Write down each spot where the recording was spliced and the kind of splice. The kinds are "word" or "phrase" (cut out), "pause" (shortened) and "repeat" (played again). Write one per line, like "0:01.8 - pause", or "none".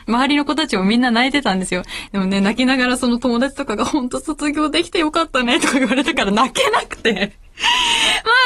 none